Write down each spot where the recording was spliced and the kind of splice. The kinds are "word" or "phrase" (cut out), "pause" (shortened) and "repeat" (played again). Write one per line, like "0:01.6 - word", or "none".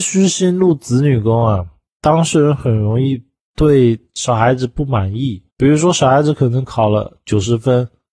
0:05.5 - pause